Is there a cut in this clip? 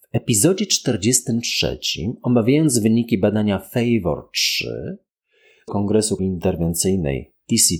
yes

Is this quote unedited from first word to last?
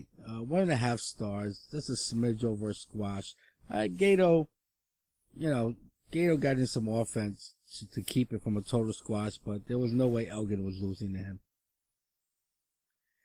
yes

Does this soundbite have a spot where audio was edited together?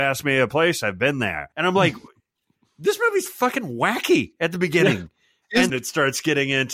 yes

